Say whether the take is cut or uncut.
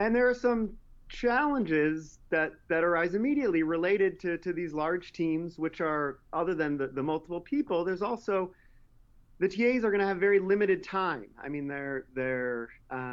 uncut